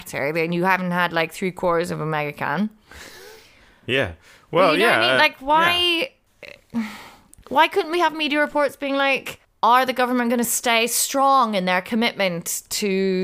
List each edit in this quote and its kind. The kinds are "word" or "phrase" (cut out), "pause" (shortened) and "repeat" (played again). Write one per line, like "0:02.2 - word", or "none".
none